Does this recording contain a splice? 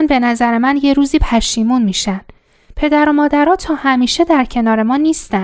no; 0 cuts

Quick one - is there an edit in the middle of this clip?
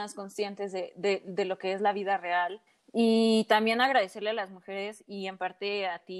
yes; 1 cut; at 2.7 s

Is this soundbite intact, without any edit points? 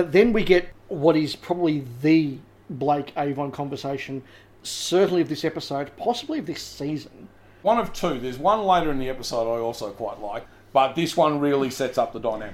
yes; 0 cuts

